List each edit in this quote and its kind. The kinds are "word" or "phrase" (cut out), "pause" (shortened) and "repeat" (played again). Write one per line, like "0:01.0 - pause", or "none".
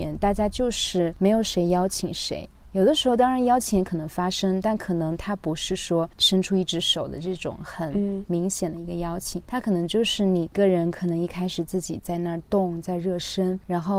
0:09.4 - word